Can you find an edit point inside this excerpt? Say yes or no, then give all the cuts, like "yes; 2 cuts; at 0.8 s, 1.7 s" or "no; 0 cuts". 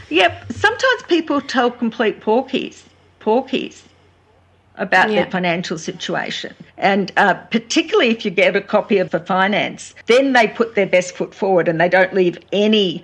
yes; 4 cuts; at 3.2 s, 6.7 s, 9.1 s, 10.0 s